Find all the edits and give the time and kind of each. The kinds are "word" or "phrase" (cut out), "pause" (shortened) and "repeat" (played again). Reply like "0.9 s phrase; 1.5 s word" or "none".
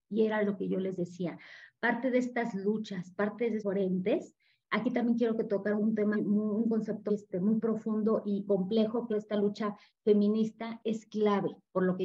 3.6 s word; 5.8 s word; 6.1 s word; 7.1 s word; 8.5 s word; 9.1 s word; 10.8 s word